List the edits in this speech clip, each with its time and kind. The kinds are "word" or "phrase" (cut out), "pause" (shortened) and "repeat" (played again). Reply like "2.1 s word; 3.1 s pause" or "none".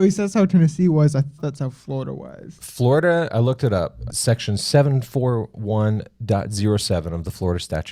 1.4 s word; 3.3 s word; 4.1 s word

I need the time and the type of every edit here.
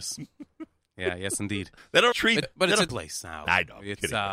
1.8 s pause; 2.1 s word; 2.4 s word; 2.9 s word

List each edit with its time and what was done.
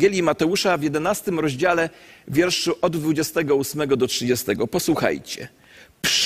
none

